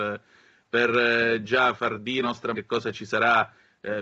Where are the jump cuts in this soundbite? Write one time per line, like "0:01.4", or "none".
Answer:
0:01.7
0:02.2
0:02.5

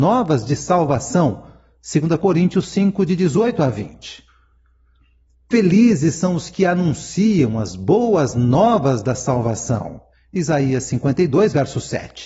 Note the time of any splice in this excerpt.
none

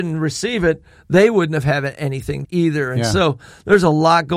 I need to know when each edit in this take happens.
0:02.4

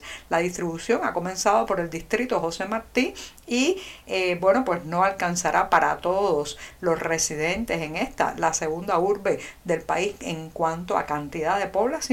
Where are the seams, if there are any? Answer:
none

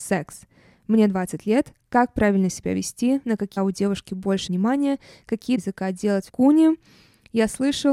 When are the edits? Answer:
0:03.6
0:04.5
0:05.6
0:06.3

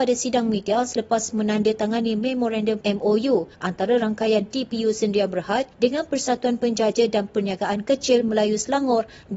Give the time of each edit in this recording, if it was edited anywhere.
0:01.3
0:02.8
0:03.5
0:05.7

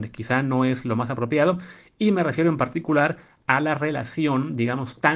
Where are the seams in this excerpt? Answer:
none

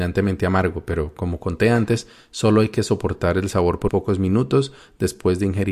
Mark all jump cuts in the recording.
0:03.9

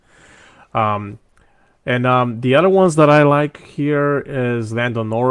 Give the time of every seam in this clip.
none

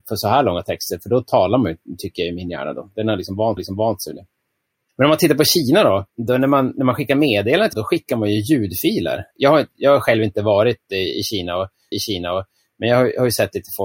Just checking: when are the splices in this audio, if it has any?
0:03.6
0:06.1
0:07.7
0:11.9

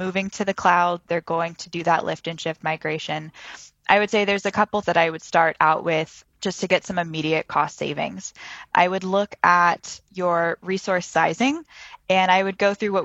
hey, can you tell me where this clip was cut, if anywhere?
0:04.8

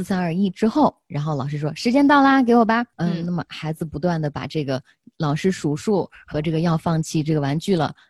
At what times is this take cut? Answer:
none

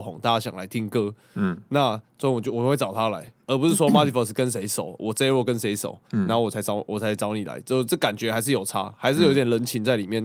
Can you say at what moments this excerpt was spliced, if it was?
0:06.0

